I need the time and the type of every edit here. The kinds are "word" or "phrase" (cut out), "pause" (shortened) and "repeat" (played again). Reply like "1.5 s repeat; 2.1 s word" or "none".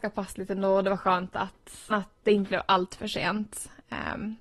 1.9 s word